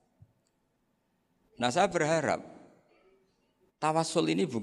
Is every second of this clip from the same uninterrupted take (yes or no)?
yes